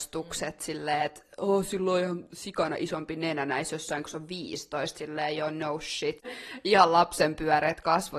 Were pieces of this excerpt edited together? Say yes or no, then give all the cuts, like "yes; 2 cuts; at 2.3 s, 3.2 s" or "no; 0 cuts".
no; 0 cuts